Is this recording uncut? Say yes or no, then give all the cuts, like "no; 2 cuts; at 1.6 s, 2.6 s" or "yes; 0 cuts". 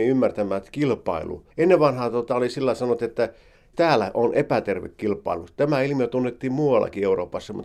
no; 1 cut; at 1.5 s